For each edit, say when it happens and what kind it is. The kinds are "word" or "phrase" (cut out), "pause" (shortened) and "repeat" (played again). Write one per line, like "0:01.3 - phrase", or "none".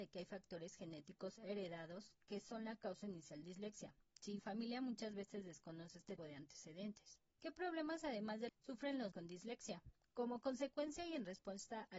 0:03.4 - phrase
0:04.4 - phrase
0:06.2 - word
0:07.3 - pause
0:08.5 - phrase
0:09.1 - word
0:10.0 - pause